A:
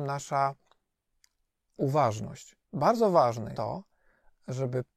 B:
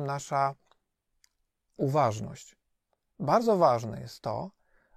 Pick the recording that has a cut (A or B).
A